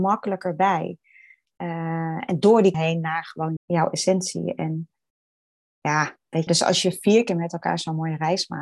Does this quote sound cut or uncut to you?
cut